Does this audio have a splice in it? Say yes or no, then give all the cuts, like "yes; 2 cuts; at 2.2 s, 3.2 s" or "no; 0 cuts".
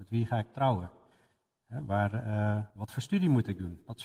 yes; 1 cut; at 2.7 s